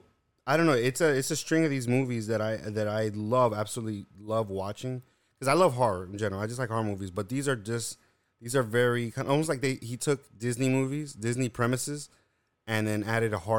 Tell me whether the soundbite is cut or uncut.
uncut